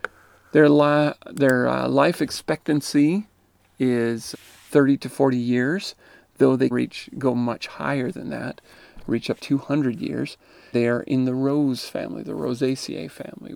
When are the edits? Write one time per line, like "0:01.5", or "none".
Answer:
0:04.3
0:06.7
0:09.4
0:10.7